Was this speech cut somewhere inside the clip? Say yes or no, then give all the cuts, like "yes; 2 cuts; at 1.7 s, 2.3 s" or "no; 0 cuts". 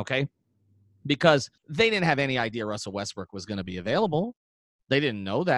yes; 1 cut; at 1.6 s